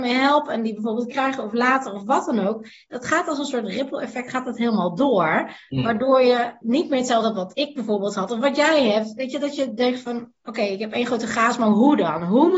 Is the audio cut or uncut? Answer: cut